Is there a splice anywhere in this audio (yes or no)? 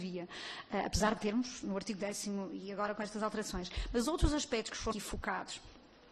yes